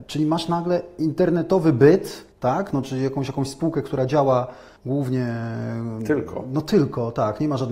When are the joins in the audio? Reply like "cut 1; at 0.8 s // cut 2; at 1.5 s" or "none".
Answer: cut 1; at 2.3 s // cut 2; at 4.8 s